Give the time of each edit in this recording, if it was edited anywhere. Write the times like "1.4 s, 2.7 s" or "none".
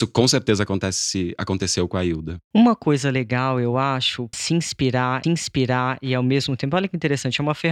4.3 s, 5.2 s